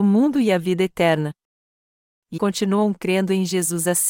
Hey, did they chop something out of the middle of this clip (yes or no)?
yes